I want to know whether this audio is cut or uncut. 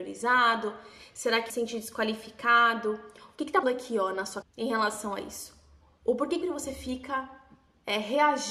cut